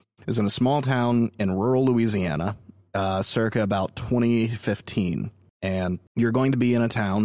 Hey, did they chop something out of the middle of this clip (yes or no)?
no